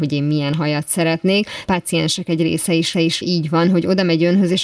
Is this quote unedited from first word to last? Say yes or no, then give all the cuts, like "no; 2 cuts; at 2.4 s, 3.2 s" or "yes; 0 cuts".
no; 2 cuts; at 1.7 s, 2.9 s